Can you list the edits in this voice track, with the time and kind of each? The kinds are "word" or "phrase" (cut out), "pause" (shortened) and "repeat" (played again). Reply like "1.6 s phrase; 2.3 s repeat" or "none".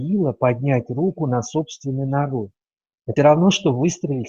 3.2 s word